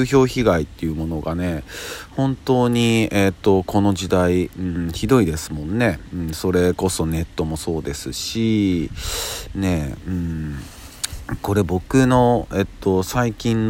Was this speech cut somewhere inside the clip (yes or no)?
no